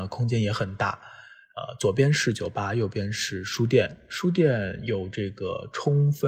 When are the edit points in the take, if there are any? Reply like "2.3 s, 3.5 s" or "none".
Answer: none